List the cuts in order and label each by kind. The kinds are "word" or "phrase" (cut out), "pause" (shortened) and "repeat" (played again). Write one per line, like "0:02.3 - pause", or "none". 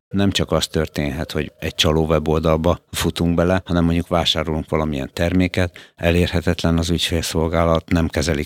none